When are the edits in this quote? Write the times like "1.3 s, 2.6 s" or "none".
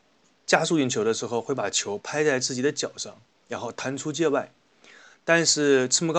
none